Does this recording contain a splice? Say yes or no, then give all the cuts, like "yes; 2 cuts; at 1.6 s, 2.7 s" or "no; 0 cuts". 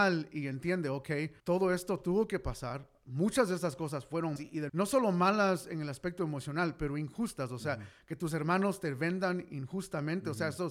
yes; 3 cuts; at 1.4 s, 4.4 s, 4.7 s